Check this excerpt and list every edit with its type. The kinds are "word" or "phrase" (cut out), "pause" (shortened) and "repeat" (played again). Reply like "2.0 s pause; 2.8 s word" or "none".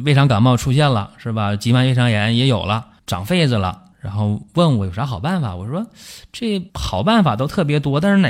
3.0 s pause; 3.9 s pause; 6.7 s pause